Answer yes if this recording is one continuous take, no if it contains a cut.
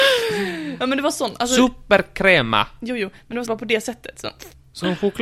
no